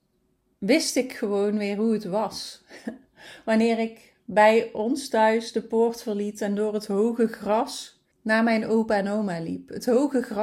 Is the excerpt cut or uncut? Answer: cut